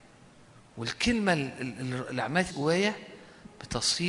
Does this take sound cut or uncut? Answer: cut